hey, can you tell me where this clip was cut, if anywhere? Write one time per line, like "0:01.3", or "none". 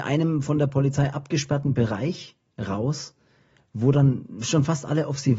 none

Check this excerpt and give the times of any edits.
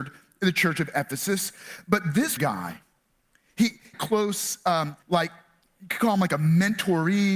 0:02.4
0:03.9
0:05.0

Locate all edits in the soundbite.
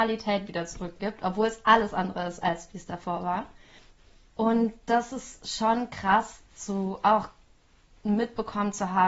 none

